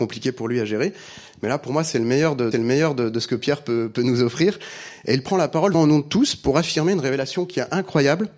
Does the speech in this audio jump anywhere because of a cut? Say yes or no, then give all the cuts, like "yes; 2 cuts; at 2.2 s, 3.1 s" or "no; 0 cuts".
yes; 2 cuts; at 2.5 s, 5.7 s